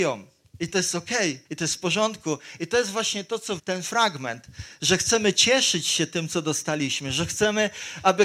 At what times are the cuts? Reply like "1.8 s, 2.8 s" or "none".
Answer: 1.4 s, 3.6 s